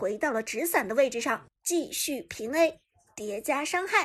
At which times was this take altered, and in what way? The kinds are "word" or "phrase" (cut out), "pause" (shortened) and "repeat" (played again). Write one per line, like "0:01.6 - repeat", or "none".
0:01.6 - pause